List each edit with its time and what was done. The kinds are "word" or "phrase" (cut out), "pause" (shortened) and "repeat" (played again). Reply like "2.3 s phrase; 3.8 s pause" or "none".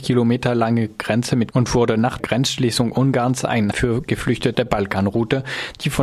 1.5 s word; 2.2 s word; 3.7 s word; 4.5 s word